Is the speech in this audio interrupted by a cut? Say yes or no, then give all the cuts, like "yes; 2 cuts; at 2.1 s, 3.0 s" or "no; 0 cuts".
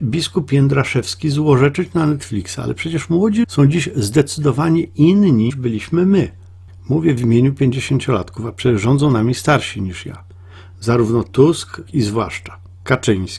yes; 3 cuts; at 3.4 s, 5.5 s, 11.9 s